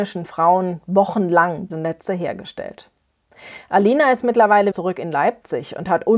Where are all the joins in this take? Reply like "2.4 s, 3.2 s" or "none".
1.7 s, 4.7 s